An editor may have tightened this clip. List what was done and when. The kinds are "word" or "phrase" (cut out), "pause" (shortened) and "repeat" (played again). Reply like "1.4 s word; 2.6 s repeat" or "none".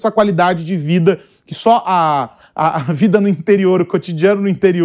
none

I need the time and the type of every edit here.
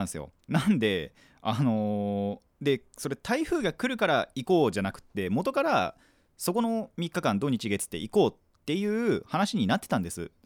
none

